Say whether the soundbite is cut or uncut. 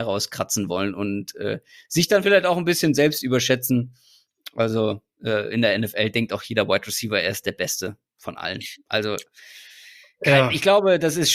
uncut